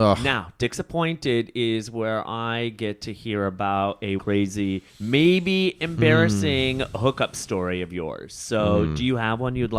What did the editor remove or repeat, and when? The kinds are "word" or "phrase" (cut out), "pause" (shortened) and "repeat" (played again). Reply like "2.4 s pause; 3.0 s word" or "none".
4.2 s word; 4.9 s pause